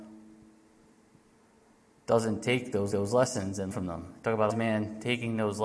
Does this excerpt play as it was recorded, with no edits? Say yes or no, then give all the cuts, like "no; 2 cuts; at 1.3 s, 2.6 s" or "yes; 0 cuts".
no; 3 cuts; at 2.9 s, 3.7 s, 4.5 s